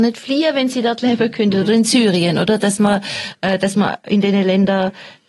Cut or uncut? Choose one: uncut